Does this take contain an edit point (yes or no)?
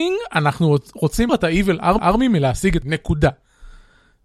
yes